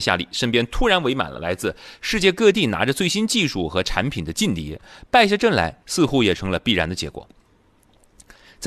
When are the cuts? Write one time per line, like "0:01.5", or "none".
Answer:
0:05.8